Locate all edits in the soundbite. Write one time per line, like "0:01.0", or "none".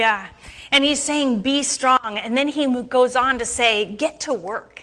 none